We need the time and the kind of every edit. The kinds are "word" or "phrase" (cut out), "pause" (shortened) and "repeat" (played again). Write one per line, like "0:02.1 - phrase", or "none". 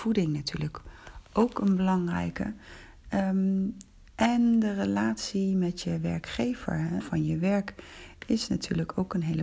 0:04.1 - pause
0:07.0 - phrase